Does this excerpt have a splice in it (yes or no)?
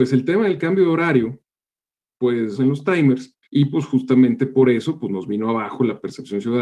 yes